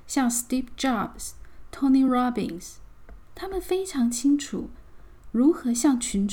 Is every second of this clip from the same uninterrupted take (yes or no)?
yes